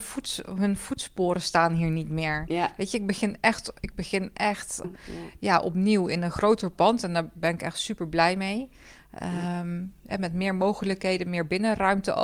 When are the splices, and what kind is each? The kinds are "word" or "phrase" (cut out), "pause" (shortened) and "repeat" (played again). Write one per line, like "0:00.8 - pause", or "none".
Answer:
0:04.8 - word